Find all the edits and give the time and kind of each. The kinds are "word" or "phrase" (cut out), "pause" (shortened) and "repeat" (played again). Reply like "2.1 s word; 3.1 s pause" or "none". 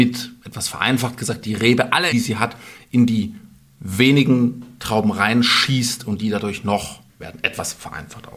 2.1 s word; 7.2 s word

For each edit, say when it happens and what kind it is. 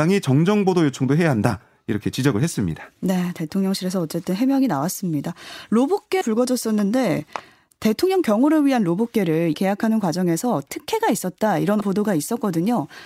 6.2 s word; 9.5 s word; 11.8 s word

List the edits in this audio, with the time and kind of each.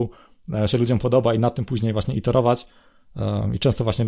none

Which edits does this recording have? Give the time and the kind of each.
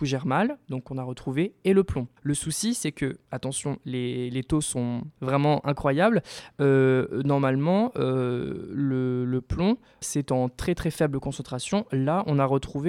2.2 s pause; 5.1 s pause; 10.0 s word

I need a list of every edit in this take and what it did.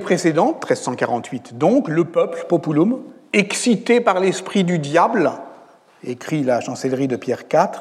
none

